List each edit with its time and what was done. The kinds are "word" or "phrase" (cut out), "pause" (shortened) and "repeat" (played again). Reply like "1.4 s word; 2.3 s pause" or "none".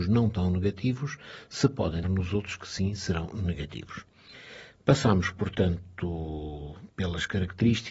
2.0 s word; 6.9 s pause

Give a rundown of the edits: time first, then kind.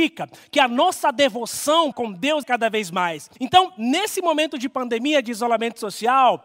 1.9 s word; 2.4 s phrase; 3.4 s pause

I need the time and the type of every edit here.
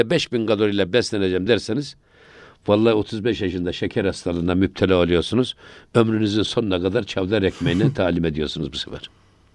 none

